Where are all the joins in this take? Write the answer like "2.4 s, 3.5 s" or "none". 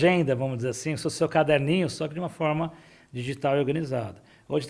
none